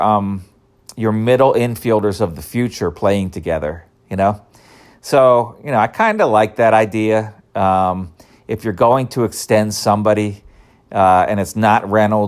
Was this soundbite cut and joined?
no; 0 cuts

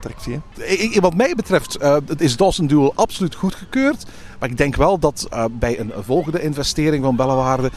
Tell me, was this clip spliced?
no; 0 cuts

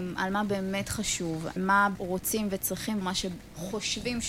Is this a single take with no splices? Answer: no; 3 cuts; at 1.6 s, 2.0 s, 3.0 s

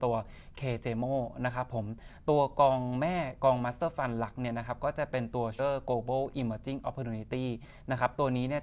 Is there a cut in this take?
yes; 1 cut; at 5.6 s

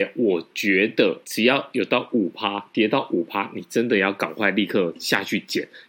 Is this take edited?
yes; 1 cut; at 1.2 s

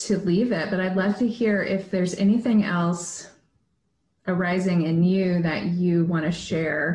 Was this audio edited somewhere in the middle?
no; 0 cuts

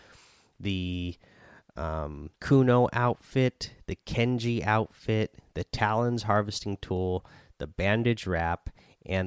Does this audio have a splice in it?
yes; 1 cut; at 2.4 s

